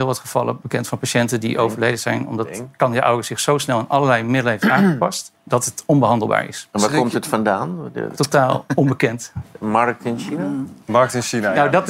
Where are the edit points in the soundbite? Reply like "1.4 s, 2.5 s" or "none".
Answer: 5.3 s, 8.1 s, 10.8 s